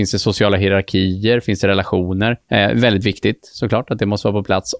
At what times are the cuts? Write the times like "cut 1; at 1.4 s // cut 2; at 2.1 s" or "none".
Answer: cut 1; at 2.4 s